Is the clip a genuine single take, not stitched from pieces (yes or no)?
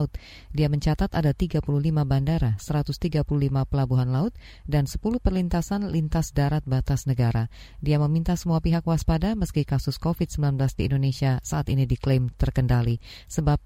yes